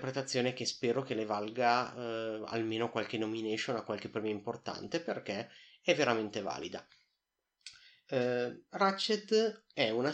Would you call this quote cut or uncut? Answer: uncut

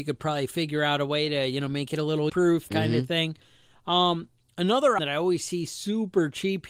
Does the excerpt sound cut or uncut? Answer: cut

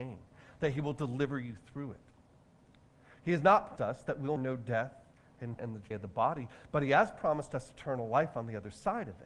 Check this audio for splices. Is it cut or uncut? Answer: cut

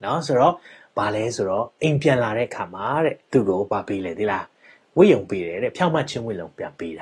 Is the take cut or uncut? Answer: cut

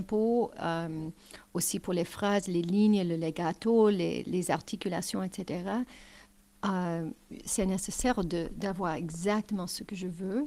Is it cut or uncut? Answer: uncut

